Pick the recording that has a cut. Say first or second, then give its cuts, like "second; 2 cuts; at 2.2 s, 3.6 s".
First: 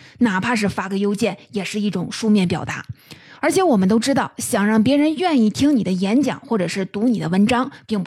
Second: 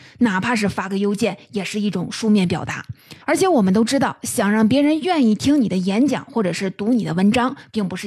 second; 1 cut; at 3.2 s